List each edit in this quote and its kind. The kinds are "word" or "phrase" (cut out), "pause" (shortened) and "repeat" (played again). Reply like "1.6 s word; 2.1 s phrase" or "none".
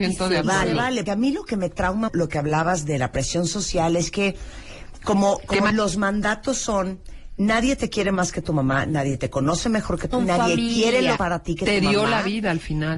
1.1 s word; 2.1 s word; 5.7 s word; 10.1 s word; 11.2 s word